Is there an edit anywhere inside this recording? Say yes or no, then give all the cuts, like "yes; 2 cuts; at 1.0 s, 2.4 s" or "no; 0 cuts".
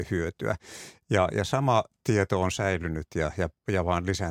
no; 0 cuts